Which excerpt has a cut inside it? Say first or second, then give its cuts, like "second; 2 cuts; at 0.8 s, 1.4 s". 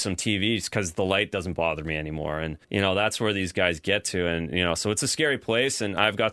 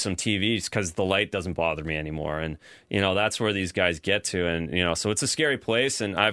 first; 1 cut; at 2.6 s